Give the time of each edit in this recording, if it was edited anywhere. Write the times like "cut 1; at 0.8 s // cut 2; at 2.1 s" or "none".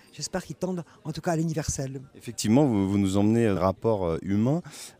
cut 1; at 2.1 s // cut 2; at 3.6 s